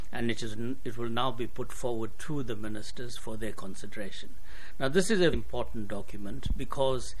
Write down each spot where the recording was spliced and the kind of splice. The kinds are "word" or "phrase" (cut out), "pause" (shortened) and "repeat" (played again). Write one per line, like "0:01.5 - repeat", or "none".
0:05.3 - word

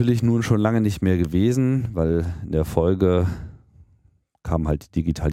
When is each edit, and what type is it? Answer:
none

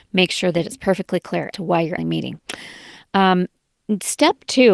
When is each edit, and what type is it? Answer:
0:01.5 - word
0:02.0 - word

